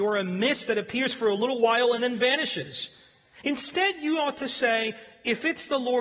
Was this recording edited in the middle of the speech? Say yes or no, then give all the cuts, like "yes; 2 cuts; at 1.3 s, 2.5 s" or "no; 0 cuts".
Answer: no; 0 cuts